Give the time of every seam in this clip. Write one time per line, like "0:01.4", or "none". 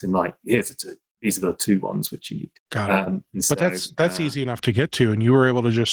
0:02.6